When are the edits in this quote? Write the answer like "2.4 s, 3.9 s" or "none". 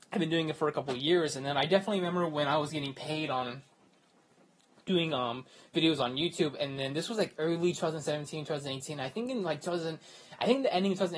none